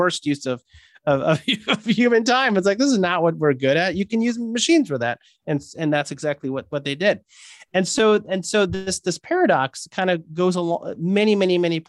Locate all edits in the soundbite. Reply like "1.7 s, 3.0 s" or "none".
none